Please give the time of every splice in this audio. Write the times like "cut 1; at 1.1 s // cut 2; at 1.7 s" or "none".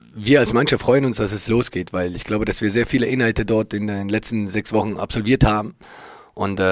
cut 1; at 1.5 s